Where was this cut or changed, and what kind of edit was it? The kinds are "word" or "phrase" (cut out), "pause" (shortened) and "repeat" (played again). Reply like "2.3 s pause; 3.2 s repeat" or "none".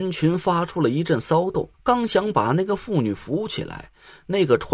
1.7 s pause